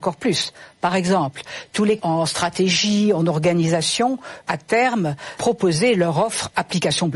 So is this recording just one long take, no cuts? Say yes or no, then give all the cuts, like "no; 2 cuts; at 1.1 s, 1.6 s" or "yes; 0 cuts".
no; 3 cuts; at 2.0 s, 4.4 s, 5.4 s